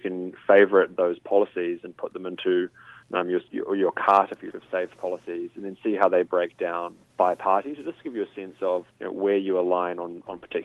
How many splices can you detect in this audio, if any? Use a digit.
4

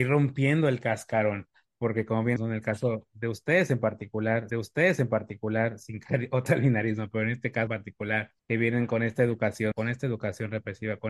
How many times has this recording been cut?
6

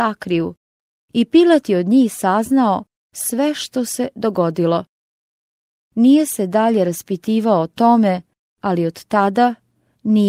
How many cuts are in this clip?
0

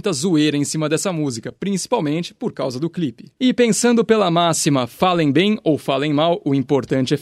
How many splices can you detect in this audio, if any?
1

